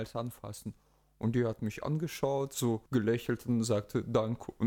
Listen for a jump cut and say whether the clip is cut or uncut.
cut